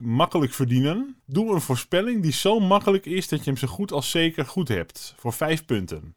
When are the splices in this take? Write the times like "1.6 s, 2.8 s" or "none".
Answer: 1.2 s